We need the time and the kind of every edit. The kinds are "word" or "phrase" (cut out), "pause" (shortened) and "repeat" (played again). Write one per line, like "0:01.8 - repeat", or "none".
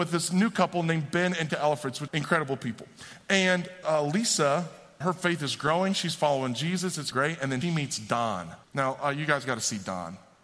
0:01.5 - word
0:02.1 - word
0:03.8 - phrase
0:05.0 - word
0:07.1 - word
0:07.6 - word
0:08.6 - pause